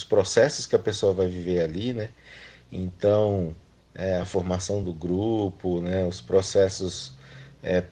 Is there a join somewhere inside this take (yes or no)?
no